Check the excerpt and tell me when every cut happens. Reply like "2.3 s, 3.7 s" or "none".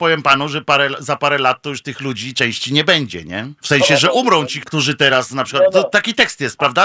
3.6 s, 4.6 s